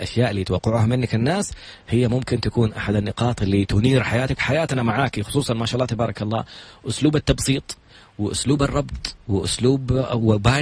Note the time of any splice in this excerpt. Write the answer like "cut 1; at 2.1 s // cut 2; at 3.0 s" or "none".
cut 1; at 4.4 s